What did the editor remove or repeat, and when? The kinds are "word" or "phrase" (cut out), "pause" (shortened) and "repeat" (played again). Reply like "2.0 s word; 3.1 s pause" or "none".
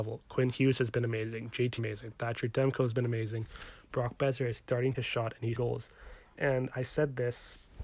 1.8 s phrase; 4.9 s phrase; 5.6 s word